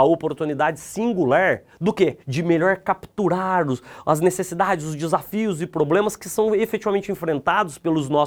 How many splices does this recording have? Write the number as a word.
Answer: one